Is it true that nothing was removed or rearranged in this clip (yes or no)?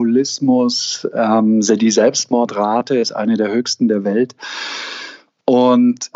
yes